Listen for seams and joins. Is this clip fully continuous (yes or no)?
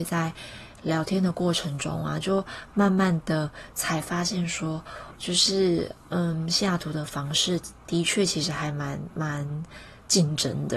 no